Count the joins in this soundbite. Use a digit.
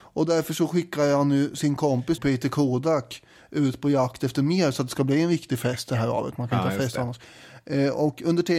1